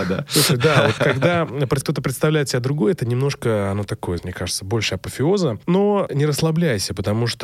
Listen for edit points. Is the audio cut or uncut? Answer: cut